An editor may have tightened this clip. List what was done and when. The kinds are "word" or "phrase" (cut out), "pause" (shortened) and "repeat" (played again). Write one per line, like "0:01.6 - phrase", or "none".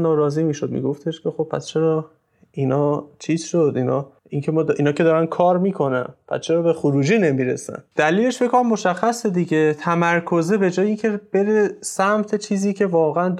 0:04.2 - pause